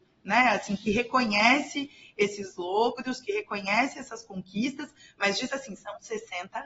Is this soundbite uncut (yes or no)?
yes